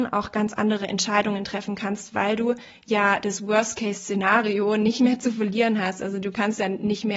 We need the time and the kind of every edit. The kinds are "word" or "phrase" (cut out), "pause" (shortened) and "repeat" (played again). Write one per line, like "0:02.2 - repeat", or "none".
none

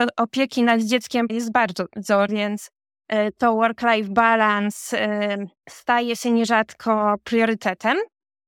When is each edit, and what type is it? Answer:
0:01.3 - phrase
0:02.3 - word
0:05.6 - pause

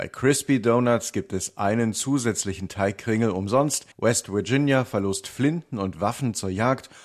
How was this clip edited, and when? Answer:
0:03.9 - pause

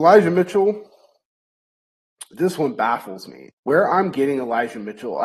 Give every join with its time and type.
0:03.6 - pause

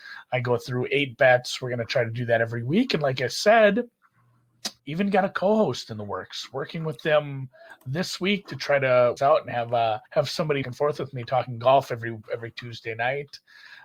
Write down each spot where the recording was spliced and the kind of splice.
0:04.8 - pause
0:09.2 - phrase
0:10.1 - pause
0:10.6 - phrase

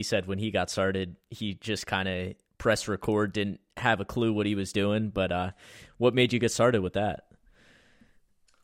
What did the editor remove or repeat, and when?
none

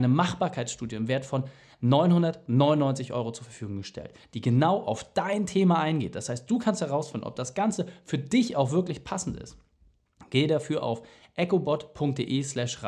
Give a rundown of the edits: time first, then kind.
none

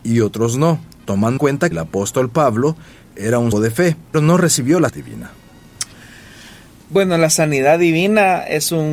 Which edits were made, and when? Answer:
0:01.4 - word
0:01.7 - word
0:03.5 - word
0:04.1 - word
0:04.9 - word

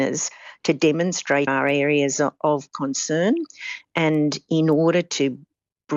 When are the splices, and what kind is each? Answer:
0:01.5 - phrase

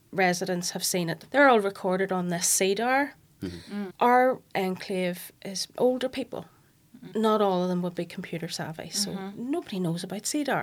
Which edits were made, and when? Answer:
none

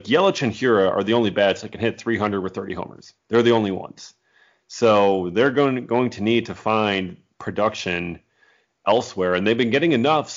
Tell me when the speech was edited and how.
0:03.2 - pause

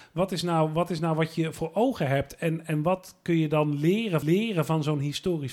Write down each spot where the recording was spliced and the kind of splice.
0:04.2 - repeat

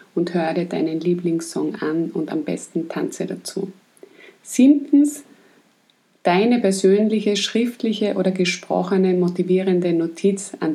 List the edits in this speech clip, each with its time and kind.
none

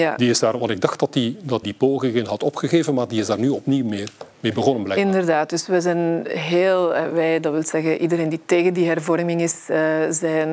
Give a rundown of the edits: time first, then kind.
0:01.6 - word

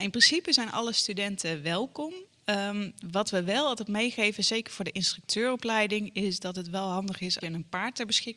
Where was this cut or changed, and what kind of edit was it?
0:07.4 - word

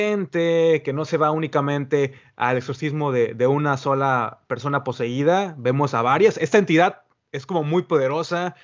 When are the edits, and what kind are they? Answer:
none

